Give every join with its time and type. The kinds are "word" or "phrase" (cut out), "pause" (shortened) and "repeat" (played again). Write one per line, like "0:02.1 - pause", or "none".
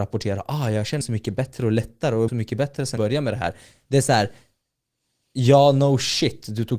0:01.0 - word
0:02.3 - word
0:03.0 - word